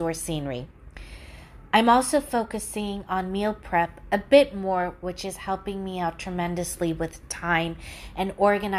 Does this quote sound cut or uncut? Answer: uncut